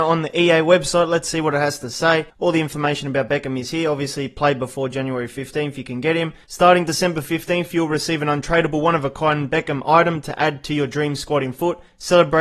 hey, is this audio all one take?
no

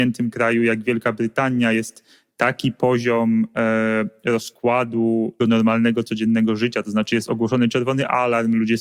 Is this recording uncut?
no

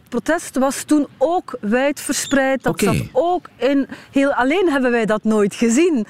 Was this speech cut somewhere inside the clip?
no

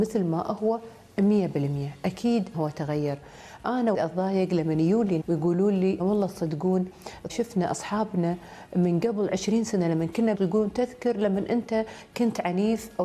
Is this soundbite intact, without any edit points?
no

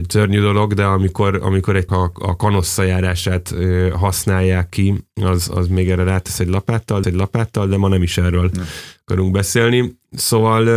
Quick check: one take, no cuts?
no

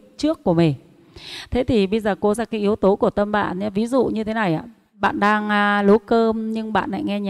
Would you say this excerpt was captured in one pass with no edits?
no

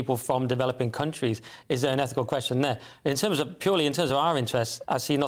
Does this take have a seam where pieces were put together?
no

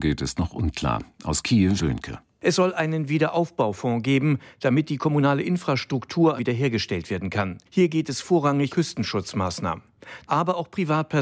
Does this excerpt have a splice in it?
yes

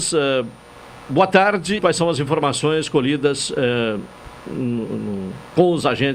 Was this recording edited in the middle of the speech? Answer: yes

